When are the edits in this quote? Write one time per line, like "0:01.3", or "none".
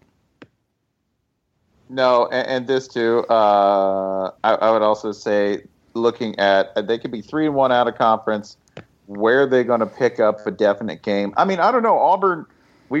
0:04.4
0:05.8